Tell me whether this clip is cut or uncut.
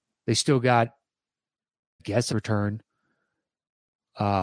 cut